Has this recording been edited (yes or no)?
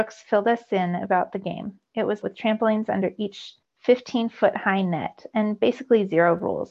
yes